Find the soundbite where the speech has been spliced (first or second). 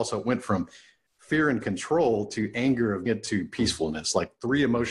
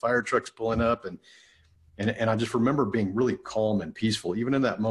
first